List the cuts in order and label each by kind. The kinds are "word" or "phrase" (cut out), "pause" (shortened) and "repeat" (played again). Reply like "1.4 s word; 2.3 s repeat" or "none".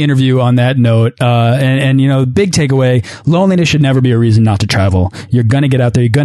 none